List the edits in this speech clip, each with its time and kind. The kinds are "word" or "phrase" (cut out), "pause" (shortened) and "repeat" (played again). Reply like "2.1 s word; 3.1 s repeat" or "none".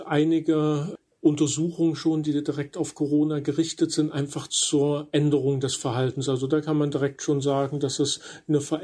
none